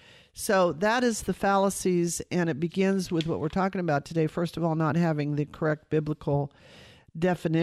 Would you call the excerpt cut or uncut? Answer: uncut